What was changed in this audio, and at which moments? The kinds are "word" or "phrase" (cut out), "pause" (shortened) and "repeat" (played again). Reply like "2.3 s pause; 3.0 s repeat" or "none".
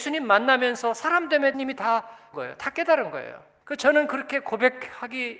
1.5 s word; 2.3 s word; 3.6 s pause